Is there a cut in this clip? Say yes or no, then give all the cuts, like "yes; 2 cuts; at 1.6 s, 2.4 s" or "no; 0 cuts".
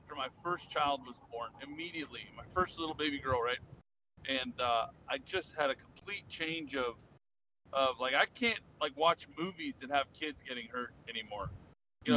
no; 0 cuts